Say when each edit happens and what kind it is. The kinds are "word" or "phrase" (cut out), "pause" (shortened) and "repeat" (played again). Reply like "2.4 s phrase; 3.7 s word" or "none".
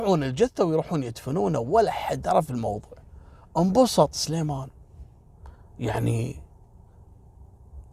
none